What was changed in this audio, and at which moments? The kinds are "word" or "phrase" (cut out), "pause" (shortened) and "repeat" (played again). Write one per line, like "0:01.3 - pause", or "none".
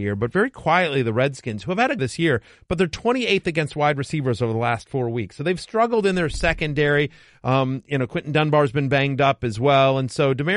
0:02.0 - phrase